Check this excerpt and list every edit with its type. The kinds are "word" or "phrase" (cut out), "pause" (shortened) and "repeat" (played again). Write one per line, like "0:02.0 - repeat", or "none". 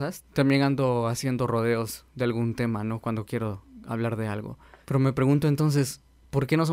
none